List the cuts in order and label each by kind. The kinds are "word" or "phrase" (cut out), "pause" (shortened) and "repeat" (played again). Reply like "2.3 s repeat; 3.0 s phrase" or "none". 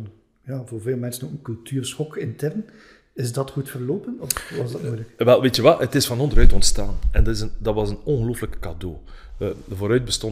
none